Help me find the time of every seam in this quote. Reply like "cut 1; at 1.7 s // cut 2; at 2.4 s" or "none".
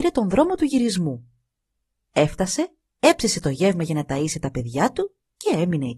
none